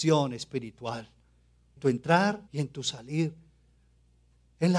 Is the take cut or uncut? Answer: cut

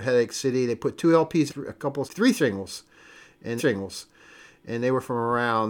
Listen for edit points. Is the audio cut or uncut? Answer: cut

